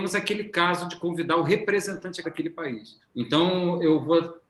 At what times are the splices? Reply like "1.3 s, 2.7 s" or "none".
2.2 s, 3.1 s